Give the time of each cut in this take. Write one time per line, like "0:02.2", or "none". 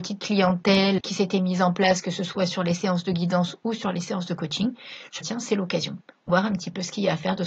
0:01.0
0:05.2
0:06.3